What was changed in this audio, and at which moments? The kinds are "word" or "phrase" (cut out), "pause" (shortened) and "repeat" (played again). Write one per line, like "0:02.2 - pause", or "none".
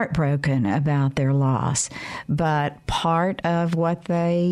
none